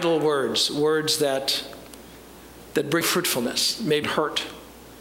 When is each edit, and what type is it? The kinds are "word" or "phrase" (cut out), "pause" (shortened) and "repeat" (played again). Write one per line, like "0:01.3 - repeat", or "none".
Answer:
0:03.0 - word
0:04.0 - word